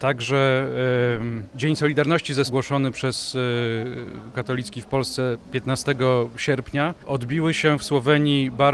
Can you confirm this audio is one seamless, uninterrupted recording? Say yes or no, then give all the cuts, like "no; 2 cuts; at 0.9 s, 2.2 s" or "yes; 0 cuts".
no; 3 cuts; at 1.5 s, 2.5 s, 4.3 s